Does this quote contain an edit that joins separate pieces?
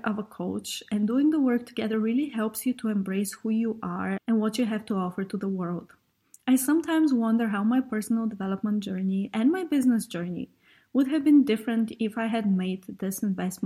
no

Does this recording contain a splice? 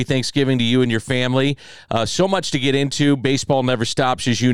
no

